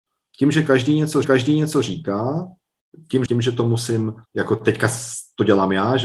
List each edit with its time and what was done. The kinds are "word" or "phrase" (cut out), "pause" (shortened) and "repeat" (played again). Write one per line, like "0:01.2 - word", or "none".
0:01.2 - repeat
0:03.3 - word
0:04.3 - pause